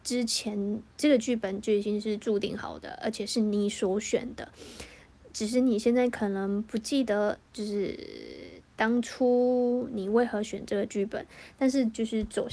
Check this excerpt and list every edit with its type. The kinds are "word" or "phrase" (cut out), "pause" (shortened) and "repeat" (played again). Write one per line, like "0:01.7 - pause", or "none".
0:00.9 - pause
0:07.4 - pause